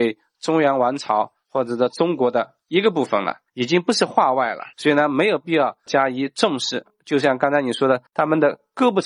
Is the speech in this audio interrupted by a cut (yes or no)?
yes